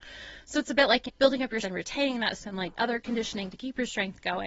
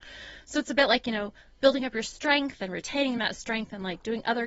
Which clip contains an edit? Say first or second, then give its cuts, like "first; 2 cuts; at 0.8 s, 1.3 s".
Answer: first; 5 cuts; at 1.1 s, 1.6 s, 2.4 s, 2.7 s, 3.5 s